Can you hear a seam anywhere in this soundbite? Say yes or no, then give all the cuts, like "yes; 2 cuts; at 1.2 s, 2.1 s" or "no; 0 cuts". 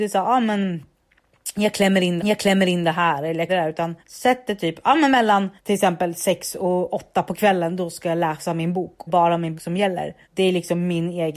yes; 7 cuts; at 2.2 s, 3.5 s, 4.0 s, 5.6 s, 9.1 s, 9.6 s, 10.2 s